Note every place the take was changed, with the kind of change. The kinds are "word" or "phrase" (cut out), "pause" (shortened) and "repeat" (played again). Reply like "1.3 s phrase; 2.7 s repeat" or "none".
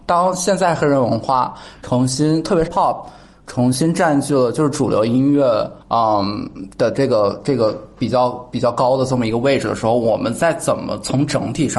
2.7 s word; 5.8 s pause